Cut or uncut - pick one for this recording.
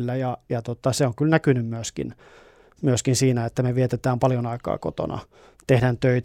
uncut